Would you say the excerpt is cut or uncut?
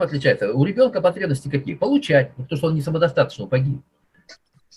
uncut